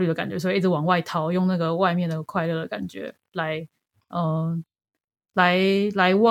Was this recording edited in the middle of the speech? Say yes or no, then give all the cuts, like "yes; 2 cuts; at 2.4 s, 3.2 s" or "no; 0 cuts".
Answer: no; 0 cuts